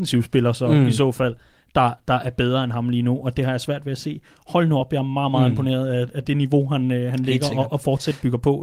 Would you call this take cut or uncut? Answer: uncut